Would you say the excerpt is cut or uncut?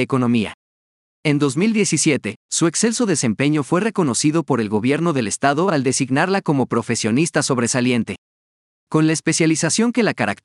uncut